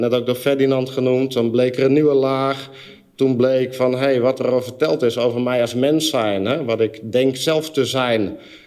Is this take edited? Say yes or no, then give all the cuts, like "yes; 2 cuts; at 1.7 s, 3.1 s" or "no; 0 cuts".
no; 0 cuts